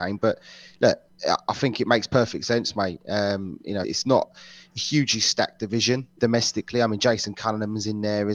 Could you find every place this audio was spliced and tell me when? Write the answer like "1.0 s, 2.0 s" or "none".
3.8 s, 6.2 s